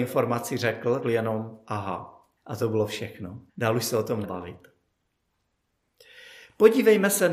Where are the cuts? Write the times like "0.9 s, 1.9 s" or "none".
1.0 s, 2.4 s, 3.5 s, 4.2 s